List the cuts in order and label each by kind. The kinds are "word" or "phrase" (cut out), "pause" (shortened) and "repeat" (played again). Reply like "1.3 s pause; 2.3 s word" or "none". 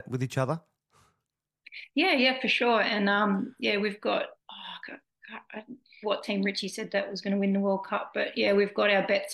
4.4 s pause; 6.0 s phrase